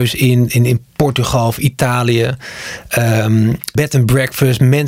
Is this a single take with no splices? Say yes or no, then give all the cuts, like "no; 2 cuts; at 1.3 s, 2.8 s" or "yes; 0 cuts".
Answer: no; 1 cut; at 3.8 s